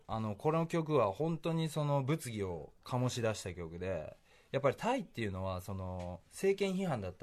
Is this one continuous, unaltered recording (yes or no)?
yes